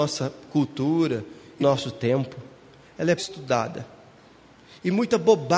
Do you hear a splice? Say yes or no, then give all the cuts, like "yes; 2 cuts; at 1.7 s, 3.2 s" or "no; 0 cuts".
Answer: yes; 2 cuts; at 1.6 s, 3.2 s